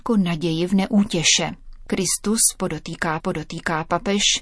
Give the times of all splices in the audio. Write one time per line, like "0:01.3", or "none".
0:03.2